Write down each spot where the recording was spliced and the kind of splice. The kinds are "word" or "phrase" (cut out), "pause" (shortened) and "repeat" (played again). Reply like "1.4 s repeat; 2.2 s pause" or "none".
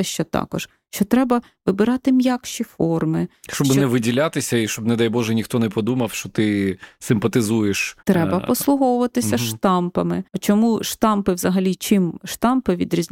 8.0 s pause; 10.3 s pause